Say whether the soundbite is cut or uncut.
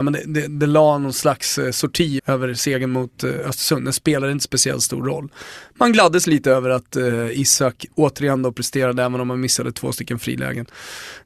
cut